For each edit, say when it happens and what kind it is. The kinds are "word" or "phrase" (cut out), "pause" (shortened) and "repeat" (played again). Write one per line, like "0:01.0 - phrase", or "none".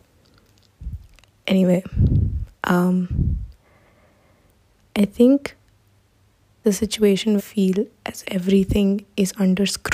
0:02.5 - pause
0:06.6 - word
0:07.4 - phrase
0:08.2 - word